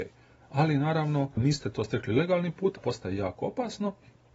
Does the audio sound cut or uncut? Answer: cut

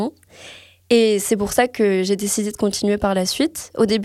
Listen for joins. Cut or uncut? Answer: uncut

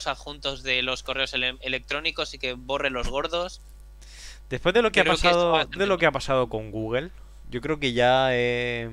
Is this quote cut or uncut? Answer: cut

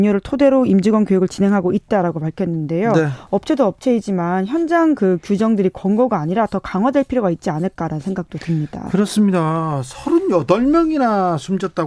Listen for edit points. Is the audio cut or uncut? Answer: uncut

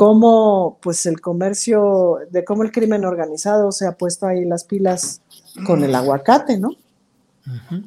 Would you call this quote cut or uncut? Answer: uncut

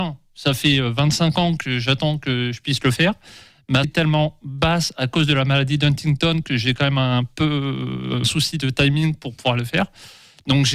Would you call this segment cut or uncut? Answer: cut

